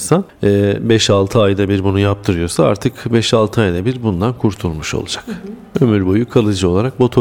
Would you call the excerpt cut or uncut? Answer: uncut